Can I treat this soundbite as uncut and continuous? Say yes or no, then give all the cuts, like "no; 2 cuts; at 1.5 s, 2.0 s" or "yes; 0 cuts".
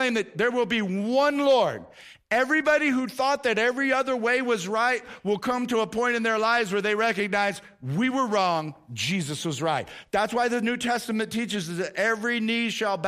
yes; 0 cuts